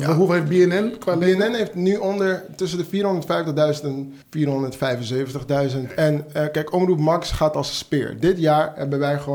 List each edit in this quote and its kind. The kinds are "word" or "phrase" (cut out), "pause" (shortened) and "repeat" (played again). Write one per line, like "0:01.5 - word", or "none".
0:04.2 - pause